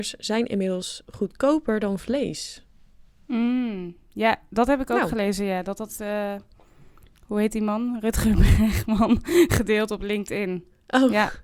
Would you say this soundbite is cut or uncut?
uncut